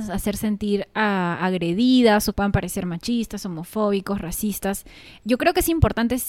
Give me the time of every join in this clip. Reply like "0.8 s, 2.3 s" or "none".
2.3 s